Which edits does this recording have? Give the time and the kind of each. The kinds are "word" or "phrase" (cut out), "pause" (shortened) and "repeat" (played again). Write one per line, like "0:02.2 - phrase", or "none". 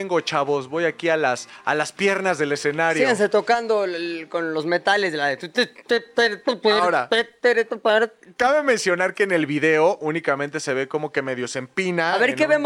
none